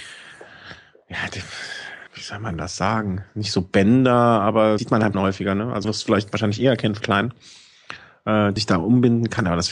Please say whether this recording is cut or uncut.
cut